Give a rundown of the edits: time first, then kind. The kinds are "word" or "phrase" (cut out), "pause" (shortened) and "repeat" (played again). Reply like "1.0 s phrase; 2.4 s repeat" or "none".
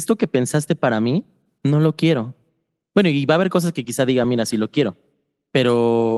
none